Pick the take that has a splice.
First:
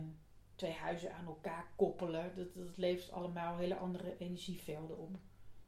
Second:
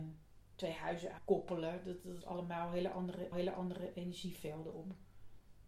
second; 3 cuts; at 1.2 s, 2.2 s, 3.3 s

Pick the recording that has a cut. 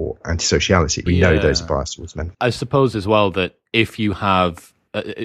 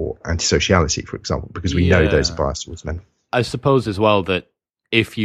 first; 3 cuts; at 1.1 s, 2.3 s, 3.7 s

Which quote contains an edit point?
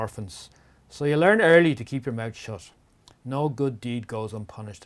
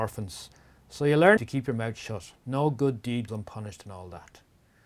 second; 3 cuts; at 1.4 s, 2.4 s, 3.3 s

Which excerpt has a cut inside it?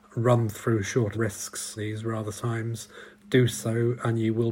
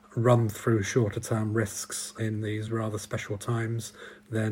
first; 4 cuts; at 1.1 s, 1.8 s, 2.3 s, 3.2 s

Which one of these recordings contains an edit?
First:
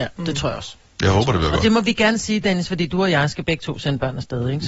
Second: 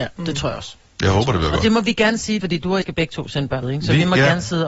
second; 3 cuts; at 2.4 s, 2.8 s, 3.6 s

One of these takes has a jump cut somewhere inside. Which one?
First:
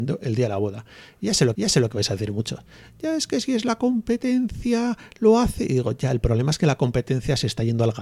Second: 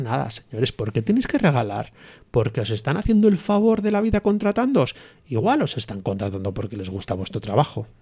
first; 1 cut; at 1.5 s

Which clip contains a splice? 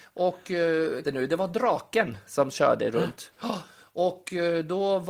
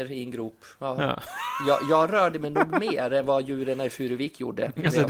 first; 1 cut; at 1.0 s

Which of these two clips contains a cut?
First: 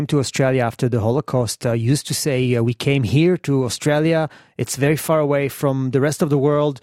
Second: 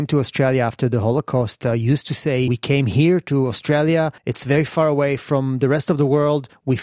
second; 2 cuts; at 2.5 s, 4.2 s

